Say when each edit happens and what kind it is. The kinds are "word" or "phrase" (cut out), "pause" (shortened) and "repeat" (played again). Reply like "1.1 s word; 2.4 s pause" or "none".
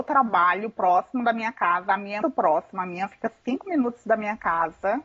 2.2 s word